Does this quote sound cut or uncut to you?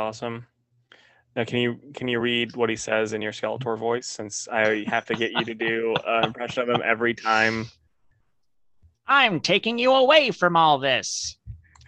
uncut